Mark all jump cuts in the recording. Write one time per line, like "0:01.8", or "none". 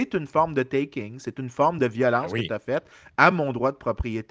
none